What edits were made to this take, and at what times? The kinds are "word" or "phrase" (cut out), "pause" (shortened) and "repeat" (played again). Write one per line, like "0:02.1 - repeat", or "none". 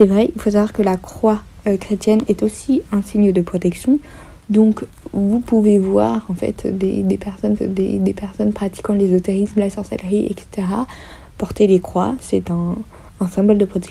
0:07.6 - repeat